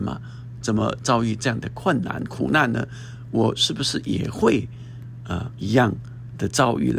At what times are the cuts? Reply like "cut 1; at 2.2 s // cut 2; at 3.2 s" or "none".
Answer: cut 1; at 5.5 s